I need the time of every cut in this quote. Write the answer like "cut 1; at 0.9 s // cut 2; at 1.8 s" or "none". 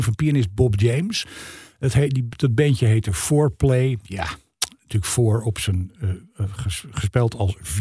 none